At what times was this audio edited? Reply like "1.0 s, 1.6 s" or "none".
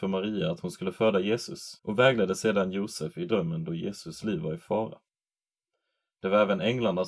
1.8 s